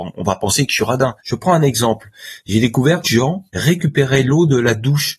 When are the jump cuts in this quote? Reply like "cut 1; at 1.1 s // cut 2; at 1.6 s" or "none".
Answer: cut 1; at 1.2 s // cut 2; at 3.0 s // cut 3; at 3.5 s